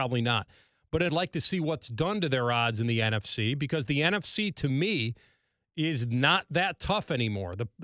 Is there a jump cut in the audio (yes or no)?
yes